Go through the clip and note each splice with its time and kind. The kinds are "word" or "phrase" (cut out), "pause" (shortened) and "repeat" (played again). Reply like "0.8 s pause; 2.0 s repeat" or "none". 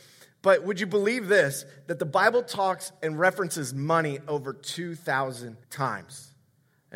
5.6 s pause